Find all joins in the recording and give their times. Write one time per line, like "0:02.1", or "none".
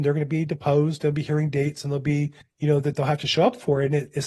0:02.4